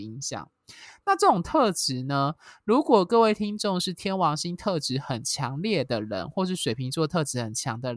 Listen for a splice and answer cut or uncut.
uncut